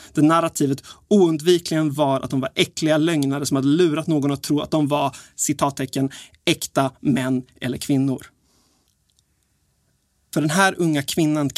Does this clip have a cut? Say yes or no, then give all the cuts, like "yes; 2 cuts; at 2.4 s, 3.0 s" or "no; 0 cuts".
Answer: no; 0 cuts